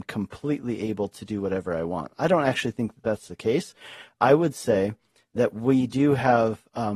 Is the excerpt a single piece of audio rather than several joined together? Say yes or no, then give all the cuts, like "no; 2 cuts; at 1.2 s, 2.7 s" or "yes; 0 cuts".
yes; 0 cuts